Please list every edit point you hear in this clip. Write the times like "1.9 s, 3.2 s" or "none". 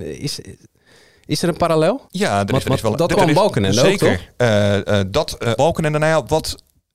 2.1 s, 2.6 s, 3.2 s, 5.6 s